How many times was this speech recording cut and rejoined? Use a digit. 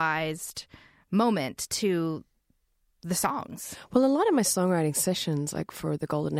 0